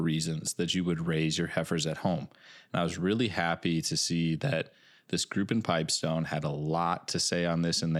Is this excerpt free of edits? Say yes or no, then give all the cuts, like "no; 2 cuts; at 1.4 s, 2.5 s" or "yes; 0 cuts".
yes; 0 cuts